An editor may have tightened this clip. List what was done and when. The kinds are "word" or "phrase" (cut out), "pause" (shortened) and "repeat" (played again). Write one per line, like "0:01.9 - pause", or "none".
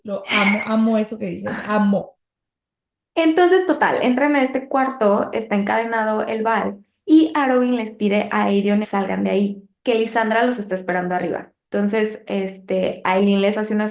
0:08.8 - phrase
0:09.8 - pause
0:11.6 - pause

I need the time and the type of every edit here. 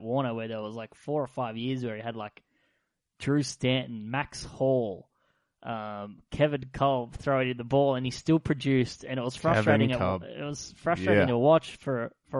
none

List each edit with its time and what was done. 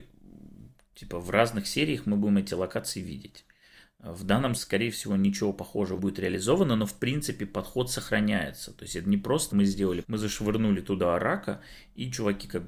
0:04.6 - word
0:06.0 - word
0:09.5 - word
0:10.0 - word

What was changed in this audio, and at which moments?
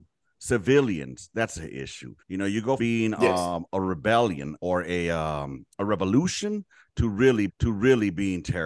0:02.2 - pause
0:02.8 - word
0:03.7 - word
0:04.6 - word
0:07.5 - repeat

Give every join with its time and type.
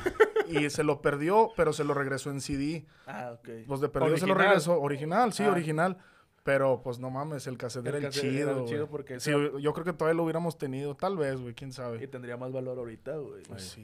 none

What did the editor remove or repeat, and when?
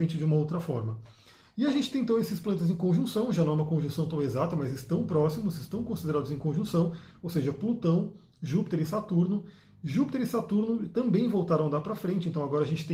none

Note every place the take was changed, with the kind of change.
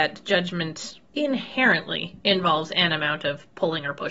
0:01.1 - pause

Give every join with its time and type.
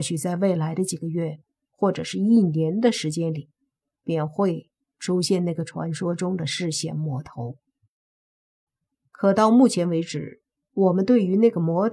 none

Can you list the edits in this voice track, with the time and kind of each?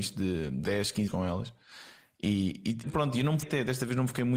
0:01.1 - word
0:02.8 - word
0:03.4 - word

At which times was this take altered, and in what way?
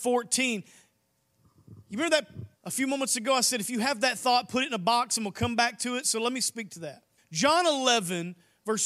0:01.8 - pause
0:02.6 - pause
0:07.2 - pause

